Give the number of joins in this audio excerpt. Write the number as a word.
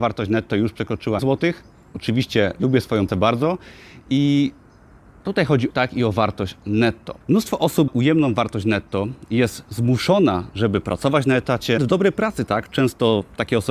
six